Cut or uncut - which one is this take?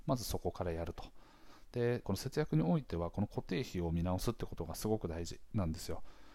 cut